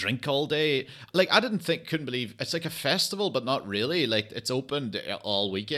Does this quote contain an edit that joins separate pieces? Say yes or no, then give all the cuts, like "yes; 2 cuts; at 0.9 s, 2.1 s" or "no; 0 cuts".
no; 0 cuts